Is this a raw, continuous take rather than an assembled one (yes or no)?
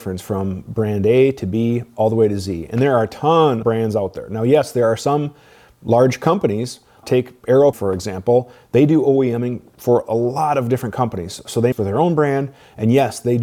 no